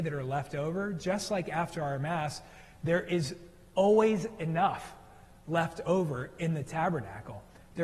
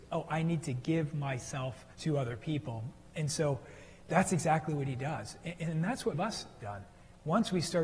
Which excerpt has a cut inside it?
second; 3 cuts; at 1.9 s, 6.1 s, 6.6 s

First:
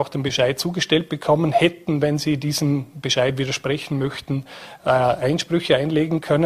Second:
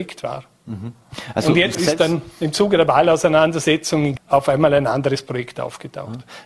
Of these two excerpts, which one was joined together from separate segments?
second; 2 cuts; at 1.7 s, 4.2 s

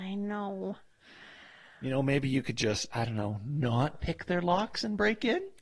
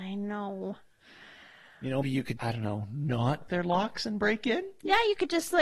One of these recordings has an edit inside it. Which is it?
second; 3 cuts; at 2.0 s, 2.4 s, 3.5 s

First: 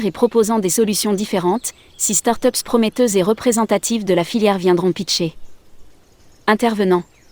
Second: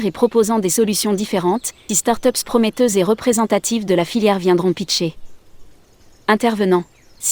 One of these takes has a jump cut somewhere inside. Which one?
second; 1 cut; at 1.9 s

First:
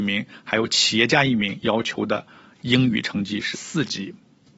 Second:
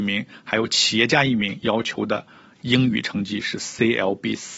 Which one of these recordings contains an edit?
first; 1 cut; at 3.5 s

